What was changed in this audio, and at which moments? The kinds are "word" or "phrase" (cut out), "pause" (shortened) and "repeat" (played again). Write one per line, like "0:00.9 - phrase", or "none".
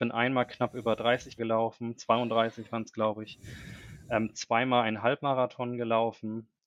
0:01.4 - word